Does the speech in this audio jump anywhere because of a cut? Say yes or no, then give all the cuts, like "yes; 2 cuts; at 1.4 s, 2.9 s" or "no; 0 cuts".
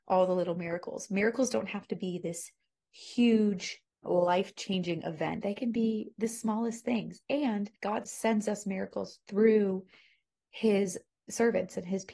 yes; 2 cuts; at 3.9 s, 7.8 s